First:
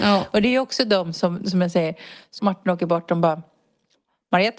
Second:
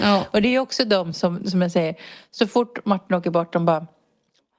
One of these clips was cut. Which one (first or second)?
first